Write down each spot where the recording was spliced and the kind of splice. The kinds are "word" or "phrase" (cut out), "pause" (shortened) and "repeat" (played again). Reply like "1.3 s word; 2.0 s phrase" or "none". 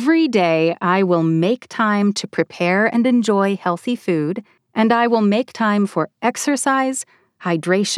4.6 s pause